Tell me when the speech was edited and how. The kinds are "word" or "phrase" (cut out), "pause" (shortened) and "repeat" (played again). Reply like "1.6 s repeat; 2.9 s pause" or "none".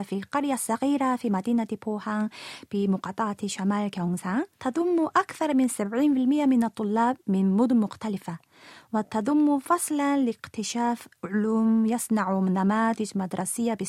4.5 s pause